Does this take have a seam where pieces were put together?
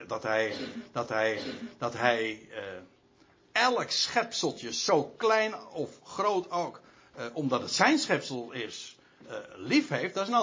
yes; 1 cut; at 1.1 s

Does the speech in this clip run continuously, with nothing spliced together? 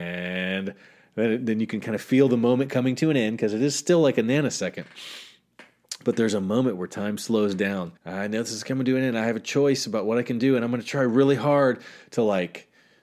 no; 1 cut; at 8.0 s

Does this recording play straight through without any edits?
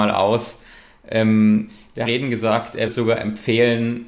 no; 2 cuts; at 2.0 s, 2.9 s

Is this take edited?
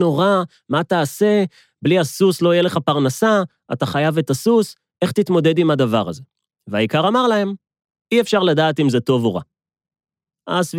no; 0 cuts

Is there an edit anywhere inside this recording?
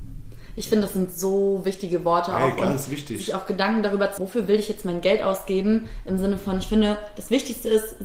yes; 1 cut; at 4.2 s

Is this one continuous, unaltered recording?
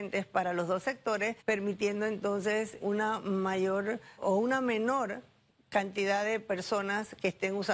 no; 4 cuts; at 1.4 s, 2.8 s, 4.2 s, 5.5 s

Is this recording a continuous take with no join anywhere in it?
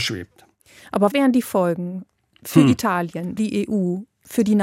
no; 2 cuts; at 1.1 s, 3.4 s

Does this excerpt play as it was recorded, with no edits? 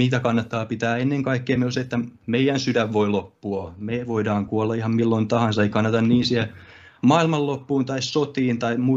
yes; 0 cuts

